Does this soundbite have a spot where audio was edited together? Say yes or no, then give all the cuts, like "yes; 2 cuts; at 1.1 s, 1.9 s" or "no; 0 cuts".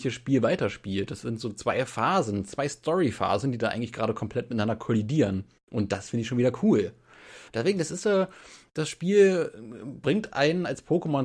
yes; 2 cuts; at 5.6 s, 7.5 s